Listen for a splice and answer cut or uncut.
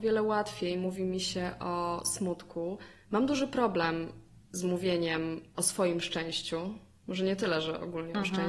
uncut